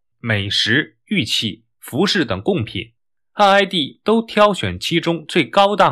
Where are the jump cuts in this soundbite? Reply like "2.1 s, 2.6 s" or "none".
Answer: none